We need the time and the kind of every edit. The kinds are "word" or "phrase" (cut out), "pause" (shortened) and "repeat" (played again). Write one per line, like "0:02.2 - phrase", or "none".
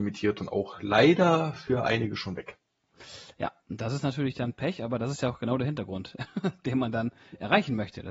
none